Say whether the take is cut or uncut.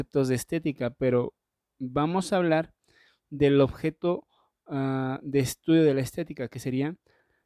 uncut